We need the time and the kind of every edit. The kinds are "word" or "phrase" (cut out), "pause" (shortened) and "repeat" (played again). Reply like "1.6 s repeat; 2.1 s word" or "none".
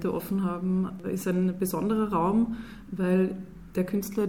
1.0 s word